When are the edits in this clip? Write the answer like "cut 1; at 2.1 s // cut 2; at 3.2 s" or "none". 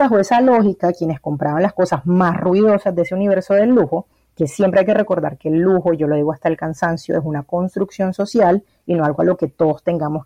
none